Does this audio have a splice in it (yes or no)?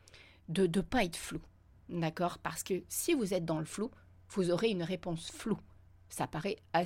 no